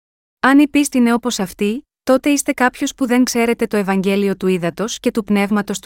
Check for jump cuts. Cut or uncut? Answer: cut